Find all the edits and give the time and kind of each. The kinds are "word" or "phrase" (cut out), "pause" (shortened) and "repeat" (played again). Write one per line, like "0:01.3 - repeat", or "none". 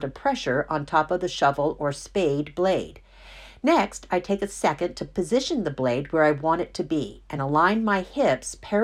none